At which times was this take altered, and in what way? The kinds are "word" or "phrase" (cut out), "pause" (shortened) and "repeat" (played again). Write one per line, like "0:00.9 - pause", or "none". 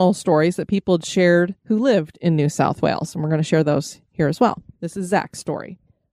none